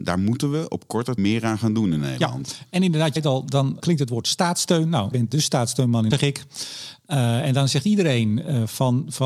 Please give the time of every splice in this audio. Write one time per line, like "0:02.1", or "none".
0:01.2
0:03.2
0:03.8
0:05.1
0:06.1